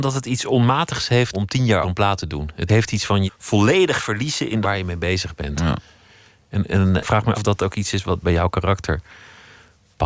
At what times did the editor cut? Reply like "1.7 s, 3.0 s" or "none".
1.3 s, 1.8 s, 2.7 s, 3.3 s, 4.6 s, 7.0 s, 7.3 s, 8.2 s

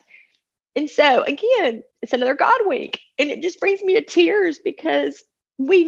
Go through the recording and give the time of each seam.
1.9 s

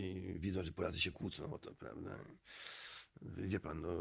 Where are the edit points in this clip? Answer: none

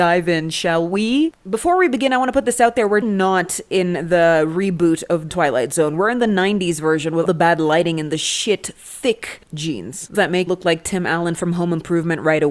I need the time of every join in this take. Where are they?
3.0 s, 5.3 s, 7.2 s, 10.1 s, 10.5 s

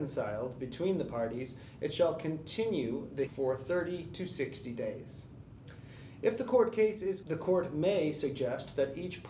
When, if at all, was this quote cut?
3.3 s, 7.2 s

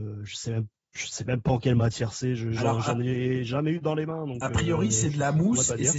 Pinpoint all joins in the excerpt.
none

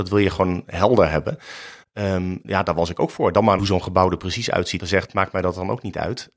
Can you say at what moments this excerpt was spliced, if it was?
2.4 s, 3.6 s, 4.8 s

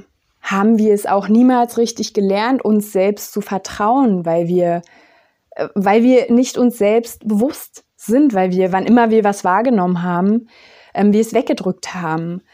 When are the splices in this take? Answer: none

